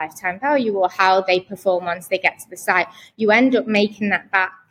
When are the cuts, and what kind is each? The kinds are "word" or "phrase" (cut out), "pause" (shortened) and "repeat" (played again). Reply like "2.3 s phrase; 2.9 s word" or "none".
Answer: none